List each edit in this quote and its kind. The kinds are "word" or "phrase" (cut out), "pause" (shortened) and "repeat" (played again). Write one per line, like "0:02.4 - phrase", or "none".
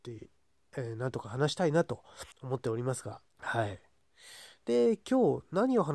0:02.3 - pause
0:03.3 - pause